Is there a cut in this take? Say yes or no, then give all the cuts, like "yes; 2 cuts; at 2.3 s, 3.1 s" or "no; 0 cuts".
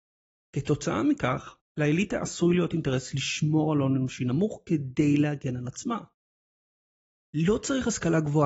yes; 1 cut; at 1.6 s